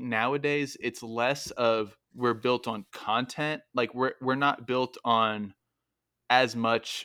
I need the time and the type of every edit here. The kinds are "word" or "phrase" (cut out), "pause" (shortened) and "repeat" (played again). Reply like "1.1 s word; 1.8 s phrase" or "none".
2.0 s pause